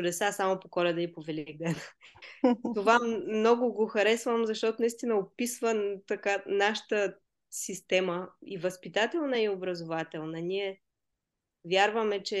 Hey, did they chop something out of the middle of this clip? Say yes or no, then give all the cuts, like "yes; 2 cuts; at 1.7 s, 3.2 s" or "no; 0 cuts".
no; 0 cuts